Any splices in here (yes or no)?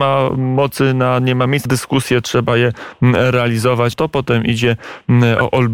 yes